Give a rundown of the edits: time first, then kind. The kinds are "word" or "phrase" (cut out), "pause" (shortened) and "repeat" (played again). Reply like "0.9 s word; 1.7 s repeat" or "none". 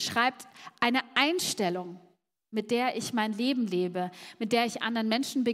none